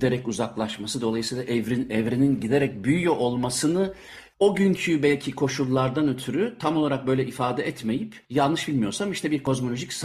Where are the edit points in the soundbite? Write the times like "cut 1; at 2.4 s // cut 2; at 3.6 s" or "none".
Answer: cut 1; at 8.2 s